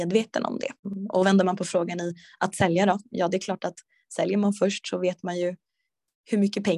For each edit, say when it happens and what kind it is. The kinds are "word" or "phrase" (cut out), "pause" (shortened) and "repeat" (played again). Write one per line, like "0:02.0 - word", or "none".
none